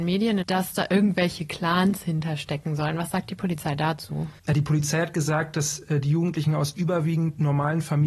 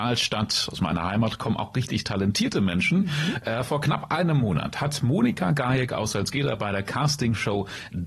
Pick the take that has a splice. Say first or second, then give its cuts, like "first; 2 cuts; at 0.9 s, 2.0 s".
first; 1 cut; at 4.4 s